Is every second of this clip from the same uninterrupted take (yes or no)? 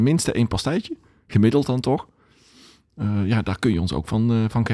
yes